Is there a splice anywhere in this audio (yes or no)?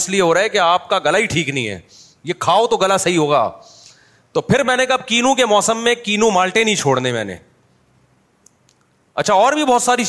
no